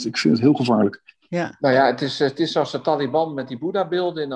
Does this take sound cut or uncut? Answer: uncut